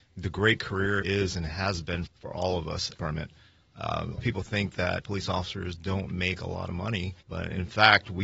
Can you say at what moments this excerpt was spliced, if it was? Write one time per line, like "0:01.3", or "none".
0:01.0
0:02.1
0:02.9
0:04.2
0:05.0
0:07.2